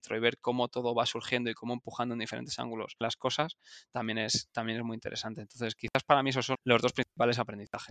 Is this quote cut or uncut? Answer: cut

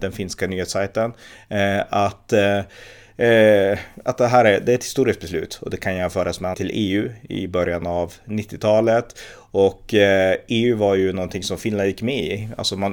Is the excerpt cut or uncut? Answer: cut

